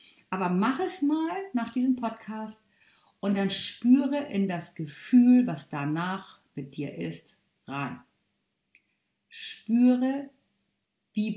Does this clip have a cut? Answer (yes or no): no